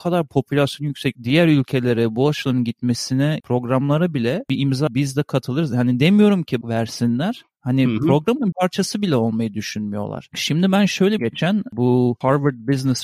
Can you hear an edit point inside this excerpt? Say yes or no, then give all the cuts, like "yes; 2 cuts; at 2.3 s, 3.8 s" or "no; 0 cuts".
yes; 6 cuts; at 1.1 s, 3.4 s, 4.9 s, 6.6 s, 8.5 s, 11.2 s